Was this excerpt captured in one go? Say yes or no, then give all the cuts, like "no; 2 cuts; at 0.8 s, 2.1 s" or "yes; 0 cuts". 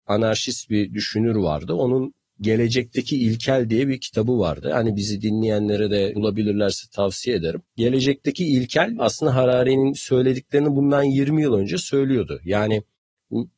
no; 1 cut; at 7.7 s